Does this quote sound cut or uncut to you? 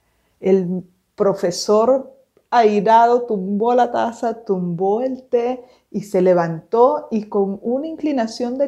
uncut